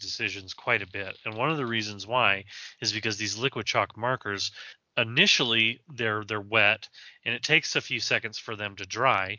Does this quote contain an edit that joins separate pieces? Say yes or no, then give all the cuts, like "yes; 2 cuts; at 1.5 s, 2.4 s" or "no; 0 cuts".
no; 0 cuts